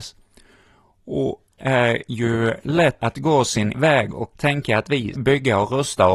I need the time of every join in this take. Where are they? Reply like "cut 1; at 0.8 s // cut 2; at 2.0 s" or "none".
cut 1; at 1.6 s // cut 2; at 3.0 s // cut 3; at 3.7 s // cut 4; at 4.3 s // cut 5; at 5.1 s